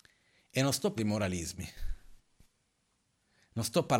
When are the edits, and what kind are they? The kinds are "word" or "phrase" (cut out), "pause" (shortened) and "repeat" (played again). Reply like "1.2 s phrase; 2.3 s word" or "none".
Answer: 1.0 s word